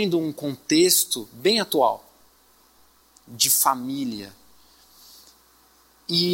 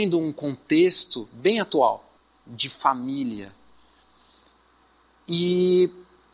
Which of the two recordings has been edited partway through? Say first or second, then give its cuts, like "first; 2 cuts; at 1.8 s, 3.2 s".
second; 1 cut; at 2.2 s